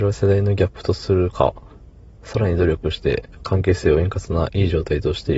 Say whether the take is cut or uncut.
uncut